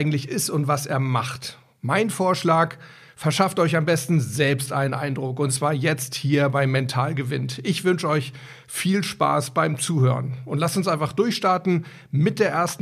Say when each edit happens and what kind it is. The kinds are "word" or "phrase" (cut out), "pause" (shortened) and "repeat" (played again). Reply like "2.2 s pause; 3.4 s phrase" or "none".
none